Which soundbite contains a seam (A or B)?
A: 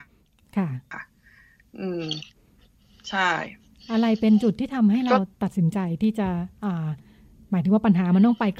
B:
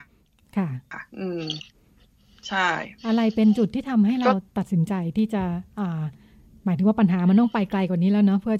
B